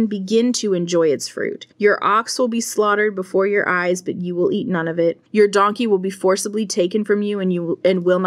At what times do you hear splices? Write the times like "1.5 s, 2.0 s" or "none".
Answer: 1.7 s, 5.3 s